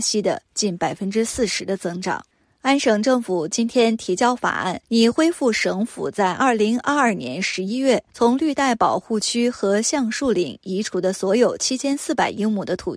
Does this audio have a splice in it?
yes; 3 cuts; at 2.3 s, 4.8 s, 8.1 s

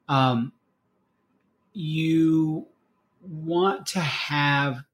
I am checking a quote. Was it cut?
no; 0 cuts

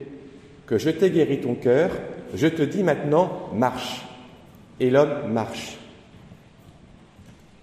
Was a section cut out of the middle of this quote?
no; 0 cuts

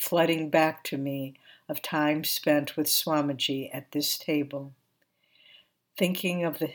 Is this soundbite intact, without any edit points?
yes; 0 cuts

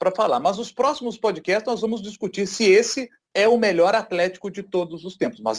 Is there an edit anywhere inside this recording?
no; 0 cuts

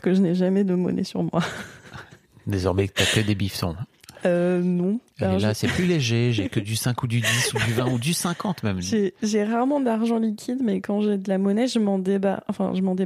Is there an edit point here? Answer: no; 0 cuts

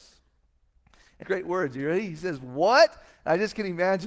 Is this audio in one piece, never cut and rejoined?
no; 1 cut; at 1.2 s

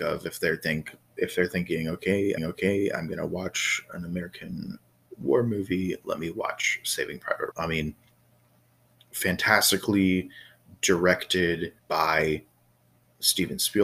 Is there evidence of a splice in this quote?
yes; 3 cuts; at 2.4 s, 7.5 s, 11.8 s

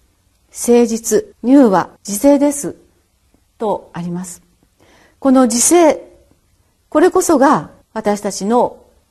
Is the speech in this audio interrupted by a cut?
yes; 3 cuts; at 1.3 s, 2.0 s, 7.8 s

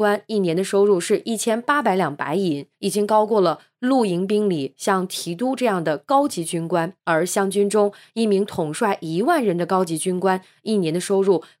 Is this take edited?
yes; 2 cuts; at 2.7 s, 7.0 s

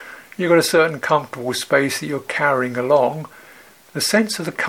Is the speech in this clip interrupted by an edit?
no; 0 cuts

